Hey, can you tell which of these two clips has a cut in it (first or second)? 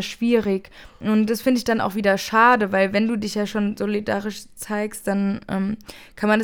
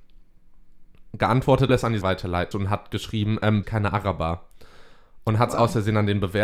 second